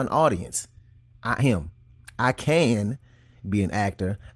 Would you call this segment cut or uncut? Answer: cut